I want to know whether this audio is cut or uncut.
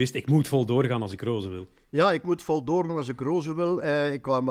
uncut